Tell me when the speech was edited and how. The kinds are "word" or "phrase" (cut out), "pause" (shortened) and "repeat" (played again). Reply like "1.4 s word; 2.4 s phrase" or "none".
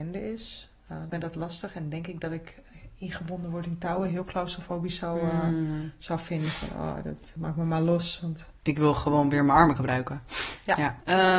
1.1 s word; 7.4 s word; 9.8 s word